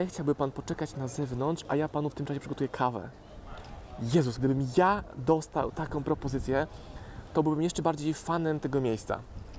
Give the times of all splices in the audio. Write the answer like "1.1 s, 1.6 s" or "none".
4.4 s